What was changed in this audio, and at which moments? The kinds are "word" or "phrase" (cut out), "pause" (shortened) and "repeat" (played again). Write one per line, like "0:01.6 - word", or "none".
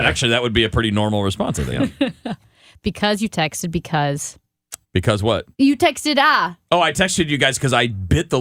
0:04.8 - pause
0:05.5 - pause